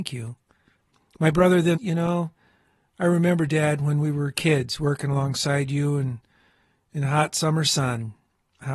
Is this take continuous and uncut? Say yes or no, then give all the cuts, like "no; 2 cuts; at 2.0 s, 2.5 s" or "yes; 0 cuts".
no; 1 cut; at 1.7 s